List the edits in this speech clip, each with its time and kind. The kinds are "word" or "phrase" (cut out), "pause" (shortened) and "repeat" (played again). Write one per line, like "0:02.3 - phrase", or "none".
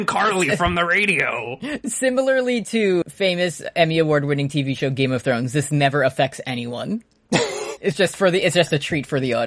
0:03.0 - word
0:07.8 - word